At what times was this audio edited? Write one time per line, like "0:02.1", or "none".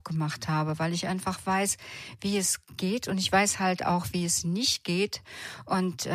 none